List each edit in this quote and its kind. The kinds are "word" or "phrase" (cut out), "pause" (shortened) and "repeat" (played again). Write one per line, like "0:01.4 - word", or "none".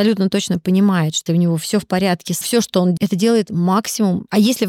0:01.3 - word
0:02.4 - phrase
0:03.0 - word

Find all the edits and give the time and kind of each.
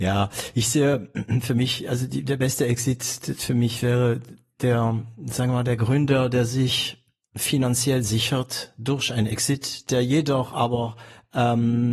none

